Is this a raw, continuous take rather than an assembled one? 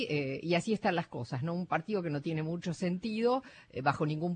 yes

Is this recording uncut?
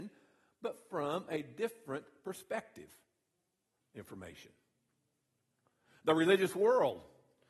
no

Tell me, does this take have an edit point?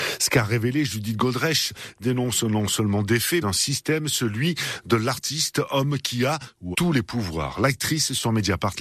yes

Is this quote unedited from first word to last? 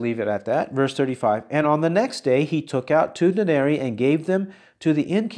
yes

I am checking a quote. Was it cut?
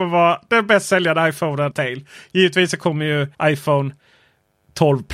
yes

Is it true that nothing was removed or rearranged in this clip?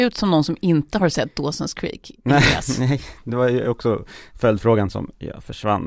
yes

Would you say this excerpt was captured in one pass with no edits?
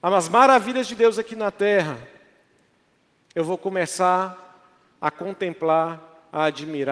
yes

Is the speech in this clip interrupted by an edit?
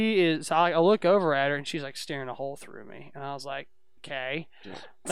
no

